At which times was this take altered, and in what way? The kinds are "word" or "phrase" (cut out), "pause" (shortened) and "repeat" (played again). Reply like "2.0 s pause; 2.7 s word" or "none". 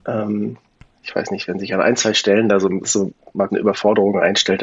2.8 s word; 3.5 s word